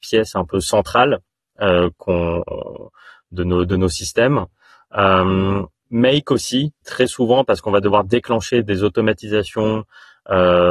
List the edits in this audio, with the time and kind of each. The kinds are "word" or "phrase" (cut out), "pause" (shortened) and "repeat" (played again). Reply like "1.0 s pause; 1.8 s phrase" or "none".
6.8 s word